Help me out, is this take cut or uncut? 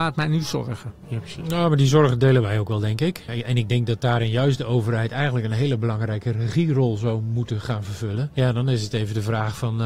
uncut